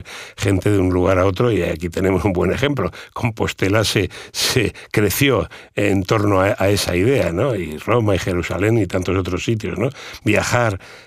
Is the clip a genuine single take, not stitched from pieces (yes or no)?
yes